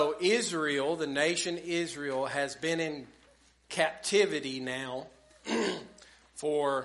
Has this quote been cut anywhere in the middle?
no; 0 cuts

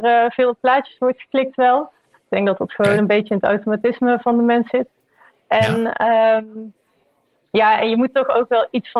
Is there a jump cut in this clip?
no; 0 cuts

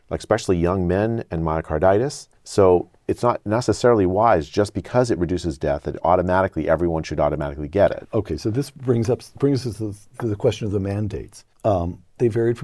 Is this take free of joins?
no; 2 cuts; at 2.3 s, 11.5 s

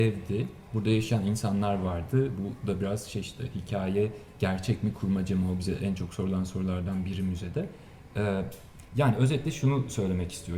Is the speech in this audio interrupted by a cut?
yes; 1 cut; at 8.9 s

